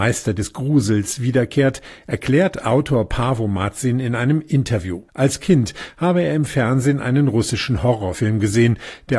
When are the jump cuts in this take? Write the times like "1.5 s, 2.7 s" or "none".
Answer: 5.1 s

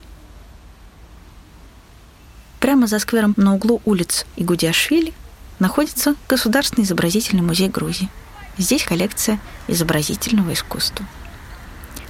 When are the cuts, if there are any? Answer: 3.3 s, 4.4 s, 8.9 s

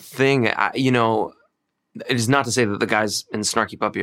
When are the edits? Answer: none

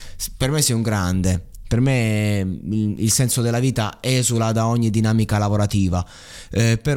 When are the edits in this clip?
none

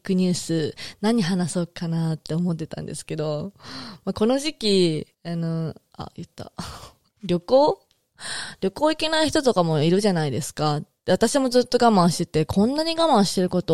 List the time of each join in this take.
5.1 s

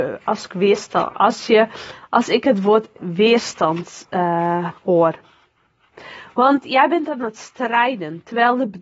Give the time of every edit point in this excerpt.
4.8 s

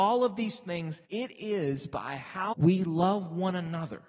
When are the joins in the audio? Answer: 1.0 s, 2.5 s

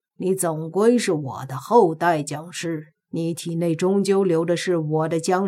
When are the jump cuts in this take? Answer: 3.0 s

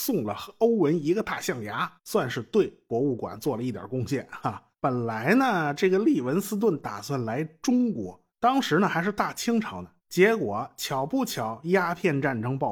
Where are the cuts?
2.0 s, 4.7 s, 8.3 s, 10.0 s

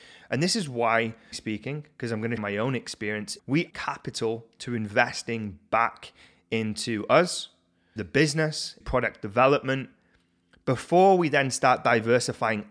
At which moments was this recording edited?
1.3 s, 2.4 s, 3.4 s, 3.7 s, 8.0 s, 8.8 s

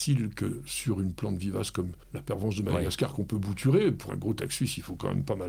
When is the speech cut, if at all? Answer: 2.0 s, 4.1 s

